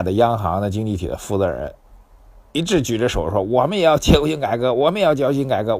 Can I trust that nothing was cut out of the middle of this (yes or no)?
yes